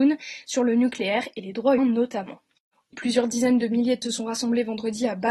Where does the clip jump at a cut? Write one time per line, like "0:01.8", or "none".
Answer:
0:01.8
0:02.9
0:04.0